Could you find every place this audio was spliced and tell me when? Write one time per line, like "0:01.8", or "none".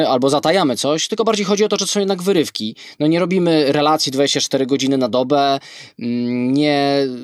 none